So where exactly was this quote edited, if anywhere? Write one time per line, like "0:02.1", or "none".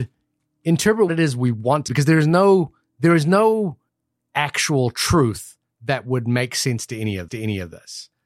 0:01.1
0:01.9
0:03.9
0:07.3